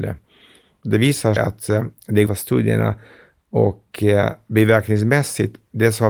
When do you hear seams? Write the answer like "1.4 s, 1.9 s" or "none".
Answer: 1.4 s, 2.3 s